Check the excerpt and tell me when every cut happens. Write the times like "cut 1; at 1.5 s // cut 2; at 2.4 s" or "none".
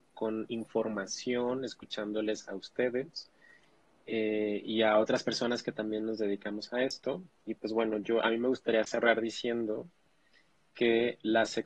none